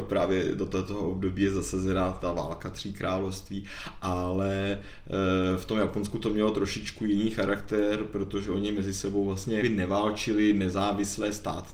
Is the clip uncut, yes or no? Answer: no